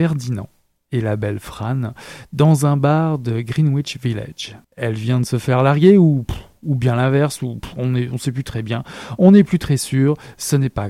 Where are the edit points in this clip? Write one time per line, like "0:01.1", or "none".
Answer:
0:04.6